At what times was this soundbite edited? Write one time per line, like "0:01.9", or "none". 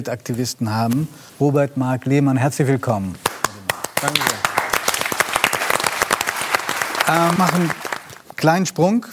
0:01.3
0:07.4

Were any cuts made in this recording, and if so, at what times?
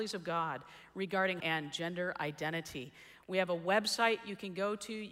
0:01.4

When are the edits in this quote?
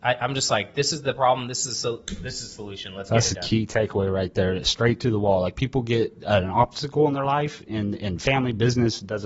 none

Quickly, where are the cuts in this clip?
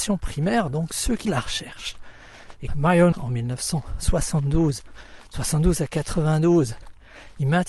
0:01.2
0:02.7
0:03.1

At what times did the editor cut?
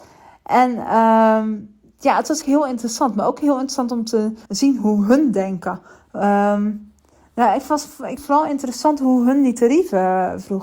0:02.4
0:04.5
0:08.2

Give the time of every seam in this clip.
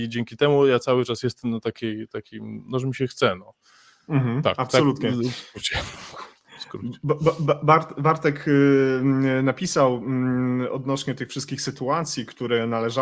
none

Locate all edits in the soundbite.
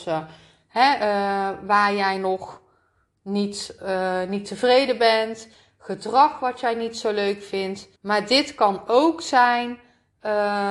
0:08.0

